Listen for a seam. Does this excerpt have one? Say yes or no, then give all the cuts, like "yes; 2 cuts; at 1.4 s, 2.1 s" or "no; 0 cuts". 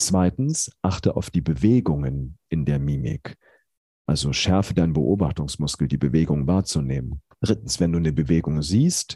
yes; 1 cut; at 7.3 s